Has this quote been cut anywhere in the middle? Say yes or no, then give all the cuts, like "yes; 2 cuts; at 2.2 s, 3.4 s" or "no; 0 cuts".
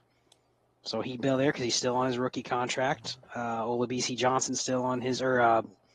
no; 0 cuts